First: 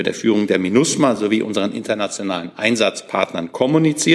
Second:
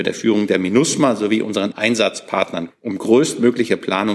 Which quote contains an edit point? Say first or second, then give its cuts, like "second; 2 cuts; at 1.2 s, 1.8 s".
second; 2 cuts; at 1.7 s, 2.7 s